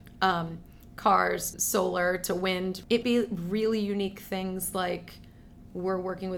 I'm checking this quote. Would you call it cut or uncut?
cut